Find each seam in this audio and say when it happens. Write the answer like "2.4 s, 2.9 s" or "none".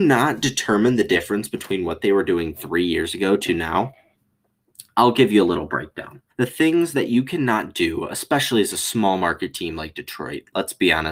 6.3 s